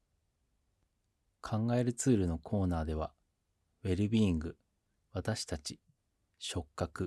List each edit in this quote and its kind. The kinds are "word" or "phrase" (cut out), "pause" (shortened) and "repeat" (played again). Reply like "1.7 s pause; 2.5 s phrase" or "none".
none

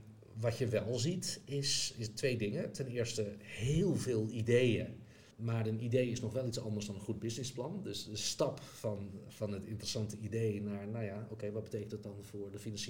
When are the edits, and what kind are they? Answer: 5.3 s pause

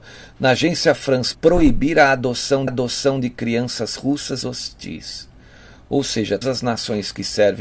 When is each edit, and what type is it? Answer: 1.3 s phrase; 2.7 s repeat; 4.4 s phrase; 6.4 s word

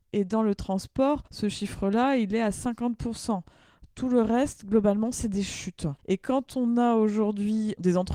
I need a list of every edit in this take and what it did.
1.3 s pause; 6.0 s pause

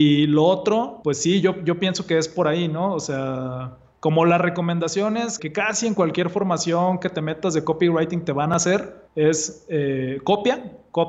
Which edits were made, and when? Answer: 1.0 s word; 3.9 s pause; 5.4 s word; 9.1 s pause

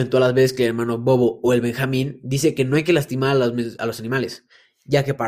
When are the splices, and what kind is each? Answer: none

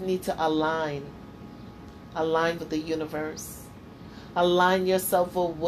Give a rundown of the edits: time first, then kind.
2.6 s word

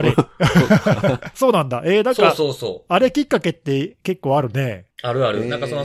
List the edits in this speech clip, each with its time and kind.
1.3 s word

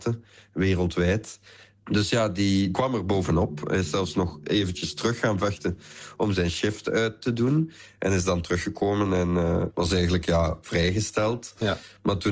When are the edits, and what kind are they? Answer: none

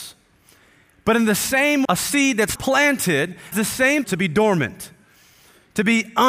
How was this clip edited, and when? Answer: 1.8 s word; 2.6 s word; 3.5 s word; 4.0 s word

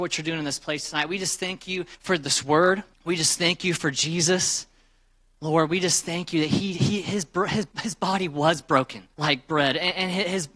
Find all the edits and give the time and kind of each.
1.9 s pause; 2.9 s pause; 7.7 s pause; 9.1 s pause

